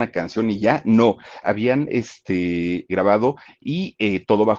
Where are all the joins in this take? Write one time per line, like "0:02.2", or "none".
0:01.4
0:02.9